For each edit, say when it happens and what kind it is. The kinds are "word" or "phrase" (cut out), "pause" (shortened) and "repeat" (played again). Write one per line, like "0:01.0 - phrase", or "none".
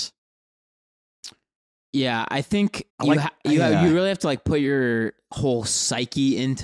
0:02.9 - pause